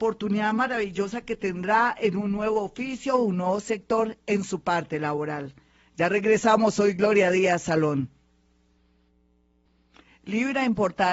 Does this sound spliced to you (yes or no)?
no